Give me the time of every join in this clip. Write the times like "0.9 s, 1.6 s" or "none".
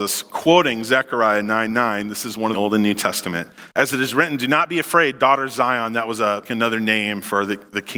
2.5 s, 3.7 s, 6.5 s